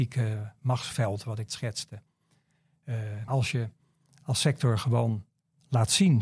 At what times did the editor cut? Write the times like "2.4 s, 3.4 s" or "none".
1.5 s, 3.3 s